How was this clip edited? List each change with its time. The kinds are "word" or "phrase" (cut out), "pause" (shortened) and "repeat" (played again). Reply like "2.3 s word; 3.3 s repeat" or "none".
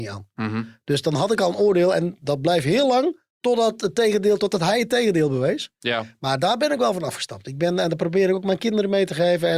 3.3 s pause